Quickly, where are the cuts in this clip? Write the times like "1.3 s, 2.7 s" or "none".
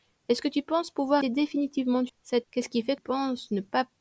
1.2 s, 2.1 s, 2.4 s, 3.0 s